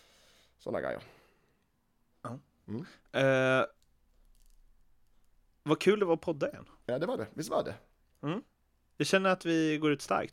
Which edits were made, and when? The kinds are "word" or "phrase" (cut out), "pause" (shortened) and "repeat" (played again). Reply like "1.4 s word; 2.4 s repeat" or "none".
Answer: none